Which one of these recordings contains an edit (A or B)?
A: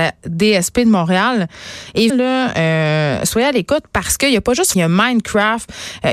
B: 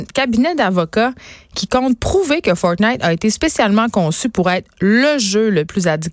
A